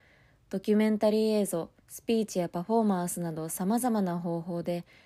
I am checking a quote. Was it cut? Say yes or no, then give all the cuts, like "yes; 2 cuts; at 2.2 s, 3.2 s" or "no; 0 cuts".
yes; 1 cut; at 1.8 s